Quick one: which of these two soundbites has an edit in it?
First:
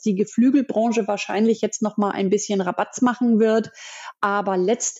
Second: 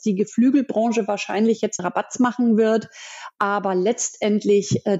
second; 1 cut; at 1.8 s

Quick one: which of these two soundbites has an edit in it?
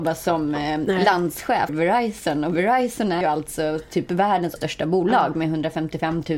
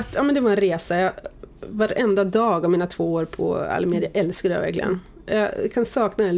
first; 3 cuts; at 1.7 s, 3.2 s, 4.6 s

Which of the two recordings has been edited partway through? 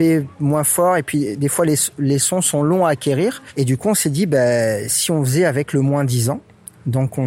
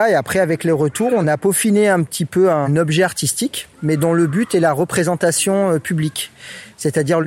second; 1 cut; at 3.7 s

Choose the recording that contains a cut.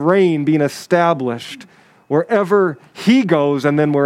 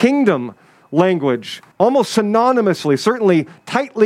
second; 1 cut; at 1.7 s

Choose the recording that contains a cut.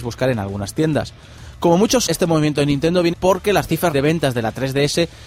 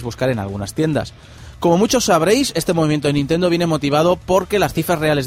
first; 3 cuts; at 2.1 s, 3.1 s, 3.9 s

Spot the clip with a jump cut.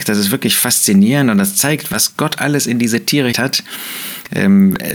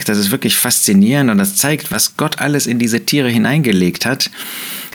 first; 1 cut; at 3.3 s

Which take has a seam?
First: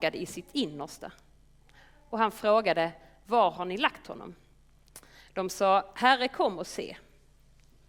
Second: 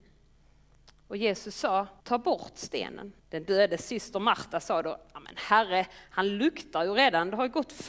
second; 2 cuts; at 2.0 s, 3.2 s

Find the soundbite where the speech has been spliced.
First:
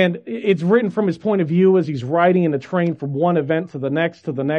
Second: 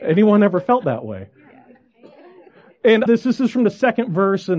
second; 1 cut; at 3.1 s

